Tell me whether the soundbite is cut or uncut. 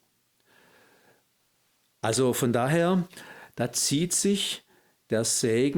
uncut